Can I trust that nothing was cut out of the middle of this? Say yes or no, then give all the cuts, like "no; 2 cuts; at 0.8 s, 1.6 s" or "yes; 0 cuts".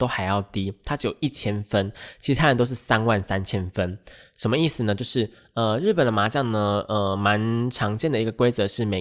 yes; 0 cuts